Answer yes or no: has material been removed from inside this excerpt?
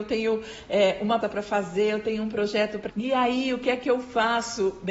yes